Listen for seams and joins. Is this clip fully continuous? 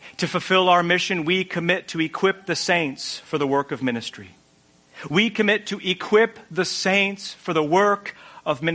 yes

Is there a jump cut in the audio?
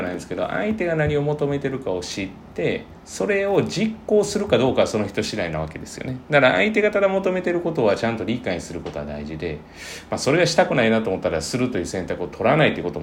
yes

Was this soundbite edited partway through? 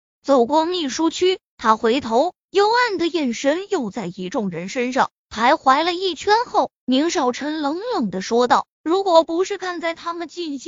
yes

